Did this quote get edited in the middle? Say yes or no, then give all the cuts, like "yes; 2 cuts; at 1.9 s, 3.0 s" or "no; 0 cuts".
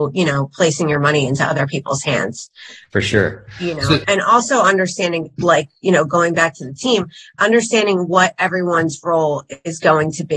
no; 0 cuts